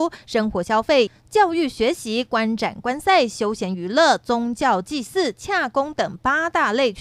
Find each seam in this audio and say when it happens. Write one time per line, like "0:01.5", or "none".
none